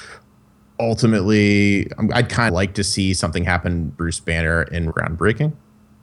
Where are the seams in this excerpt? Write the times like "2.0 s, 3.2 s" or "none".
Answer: 2.5 s, 3.9 s, 4.9 s